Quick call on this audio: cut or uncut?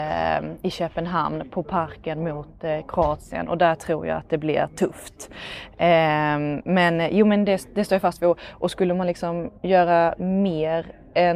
cut